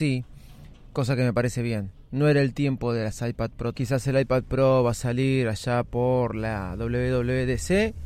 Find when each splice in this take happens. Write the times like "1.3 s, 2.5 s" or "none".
3.7 s